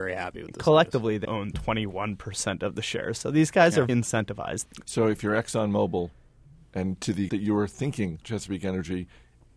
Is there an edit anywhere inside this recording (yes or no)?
yes